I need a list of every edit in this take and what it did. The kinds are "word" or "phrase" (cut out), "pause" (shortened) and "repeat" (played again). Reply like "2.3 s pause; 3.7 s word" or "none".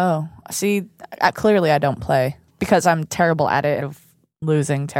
2.5 s word; 3.8 s phrase